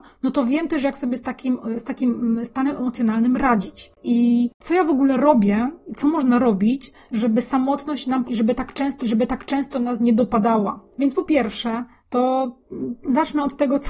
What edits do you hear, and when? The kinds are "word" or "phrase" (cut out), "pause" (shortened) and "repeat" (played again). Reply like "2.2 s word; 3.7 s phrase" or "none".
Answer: 8.2 s phrase; 9.0 s repeat